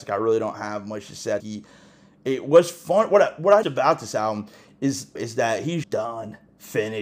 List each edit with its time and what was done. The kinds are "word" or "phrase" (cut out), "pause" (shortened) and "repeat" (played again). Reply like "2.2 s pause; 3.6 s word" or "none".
1.4 s word; 3.6 s word; 5.2 s phrase; 5.8 s word